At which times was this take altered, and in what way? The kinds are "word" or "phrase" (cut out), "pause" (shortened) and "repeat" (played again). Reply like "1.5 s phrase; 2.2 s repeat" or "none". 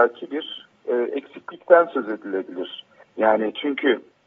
3.0 s pause